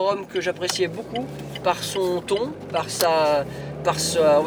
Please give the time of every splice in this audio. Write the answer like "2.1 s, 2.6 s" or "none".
none